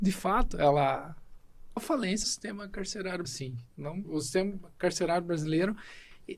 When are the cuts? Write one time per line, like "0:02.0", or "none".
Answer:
0:01.8
0:02.2
0:03.2
0:04.0